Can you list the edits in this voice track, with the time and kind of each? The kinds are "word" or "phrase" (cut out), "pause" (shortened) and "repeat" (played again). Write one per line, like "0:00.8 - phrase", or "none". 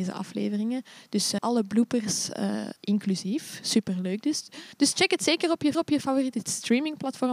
0:01.4 - word
0:02.8 - pause
0:04.7 - pause
0:05.7 - repeat